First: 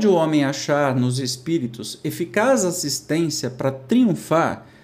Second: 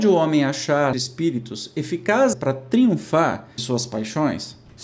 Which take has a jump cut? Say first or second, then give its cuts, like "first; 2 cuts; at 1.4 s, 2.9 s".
second; 3 cuts; at 0.9 s, 2.3 s, 3.6 s